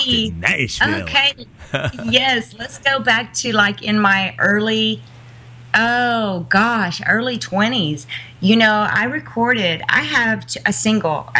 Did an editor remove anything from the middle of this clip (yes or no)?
no